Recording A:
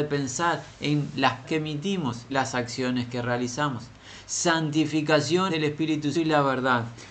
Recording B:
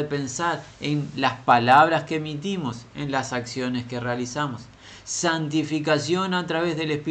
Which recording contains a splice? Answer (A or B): A